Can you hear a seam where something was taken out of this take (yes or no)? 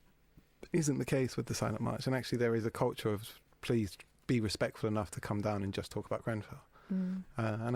no